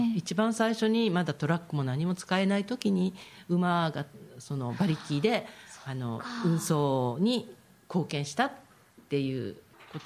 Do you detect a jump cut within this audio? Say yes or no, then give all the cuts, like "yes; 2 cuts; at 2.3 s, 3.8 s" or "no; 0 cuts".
no; 0 cuts